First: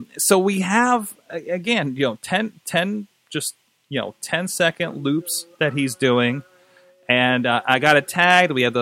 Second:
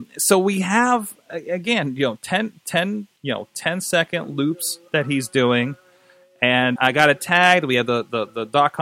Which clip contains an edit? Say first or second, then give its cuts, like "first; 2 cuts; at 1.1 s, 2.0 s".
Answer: second; 2 cuts; at 3.2 s, 6.8 s